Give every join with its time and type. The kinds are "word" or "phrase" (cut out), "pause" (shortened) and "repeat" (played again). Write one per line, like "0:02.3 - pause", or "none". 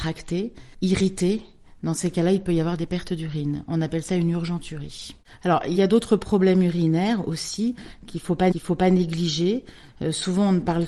0:05.8 - word
0:08.5 - repeat